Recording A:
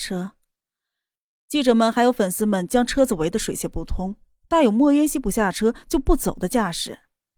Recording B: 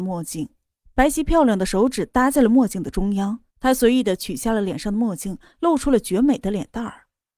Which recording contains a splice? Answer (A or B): B